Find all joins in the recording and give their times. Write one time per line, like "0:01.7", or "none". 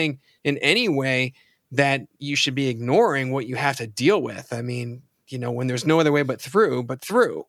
none